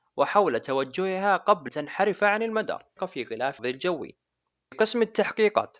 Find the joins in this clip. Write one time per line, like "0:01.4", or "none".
0:01.7
0:03.0
0:03.6
0:04.7

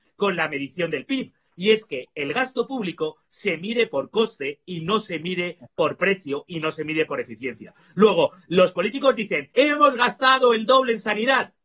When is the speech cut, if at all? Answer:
0:09.5

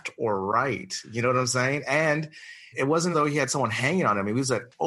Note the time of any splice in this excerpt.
0:02.7
0:03.1

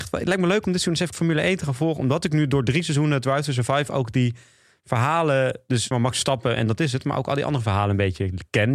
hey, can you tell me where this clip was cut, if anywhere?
0:01.1
0:05.9

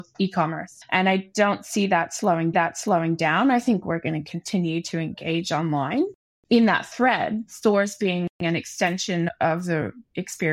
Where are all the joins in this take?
0:02.5

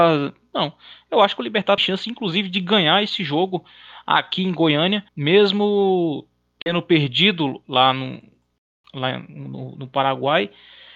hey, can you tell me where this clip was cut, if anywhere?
0:01.8
0:05.1

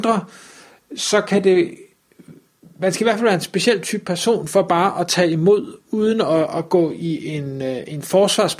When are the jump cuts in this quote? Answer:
0:02.6

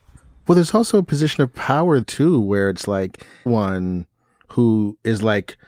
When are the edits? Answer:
0:02.0
0:03.5

